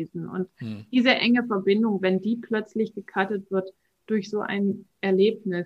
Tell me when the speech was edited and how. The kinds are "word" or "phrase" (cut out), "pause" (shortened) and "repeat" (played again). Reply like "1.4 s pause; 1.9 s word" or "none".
none